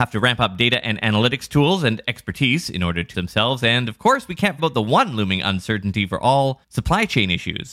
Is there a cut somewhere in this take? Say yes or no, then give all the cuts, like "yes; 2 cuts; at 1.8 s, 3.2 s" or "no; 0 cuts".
yes; 3 cuts; at 3.1 s, 4.6 s, 6.6 s